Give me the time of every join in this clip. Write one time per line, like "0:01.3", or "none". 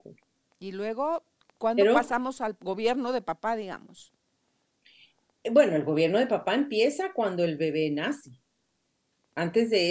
none